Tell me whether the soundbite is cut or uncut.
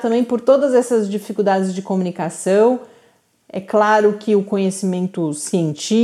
uncut